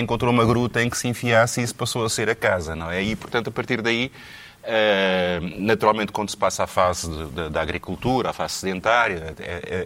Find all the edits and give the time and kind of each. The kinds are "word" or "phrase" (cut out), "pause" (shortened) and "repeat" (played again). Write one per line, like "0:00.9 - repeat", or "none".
none